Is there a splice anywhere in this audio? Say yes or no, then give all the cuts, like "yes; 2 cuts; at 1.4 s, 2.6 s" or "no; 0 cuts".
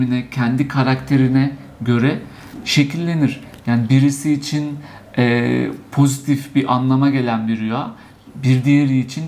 no; 0 cuts